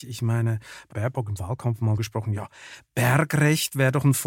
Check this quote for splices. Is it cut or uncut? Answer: cut